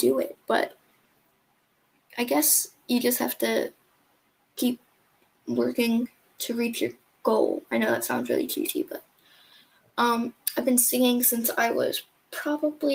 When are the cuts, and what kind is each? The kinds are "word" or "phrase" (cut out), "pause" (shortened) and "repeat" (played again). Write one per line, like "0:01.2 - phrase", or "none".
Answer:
none